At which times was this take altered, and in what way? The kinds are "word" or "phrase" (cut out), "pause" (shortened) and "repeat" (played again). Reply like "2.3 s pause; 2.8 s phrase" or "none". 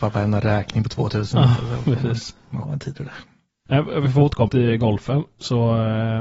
2.6 s word; 4.5 s word